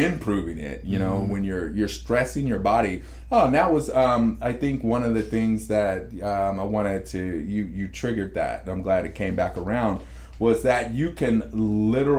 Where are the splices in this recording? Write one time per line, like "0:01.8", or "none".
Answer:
none